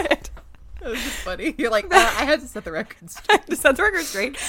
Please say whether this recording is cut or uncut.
uncut